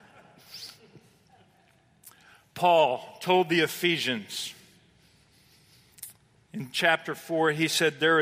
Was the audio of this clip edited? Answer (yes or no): yes